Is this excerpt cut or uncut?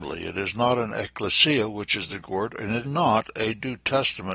cut